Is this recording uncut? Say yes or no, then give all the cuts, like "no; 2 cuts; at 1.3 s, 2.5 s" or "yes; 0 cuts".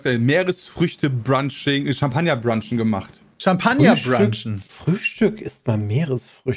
yes; 0 cuts